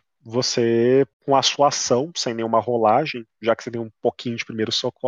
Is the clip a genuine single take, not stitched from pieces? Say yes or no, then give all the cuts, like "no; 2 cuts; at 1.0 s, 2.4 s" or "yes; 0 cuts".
no; 1 cut; at 1.1 s